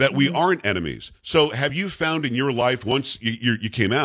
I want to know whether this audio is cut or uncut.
uncut